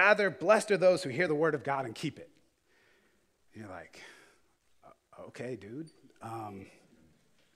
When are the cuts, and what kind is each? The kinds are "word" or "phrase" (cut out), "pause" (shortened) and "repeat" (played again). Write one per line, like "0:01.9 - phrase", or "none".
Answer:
none